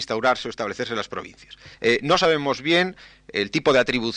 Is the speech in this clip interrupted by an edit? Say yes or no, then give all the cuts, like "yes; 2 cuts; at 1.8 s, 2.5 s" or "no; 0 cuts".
yes; 1 cut; at 1.7 s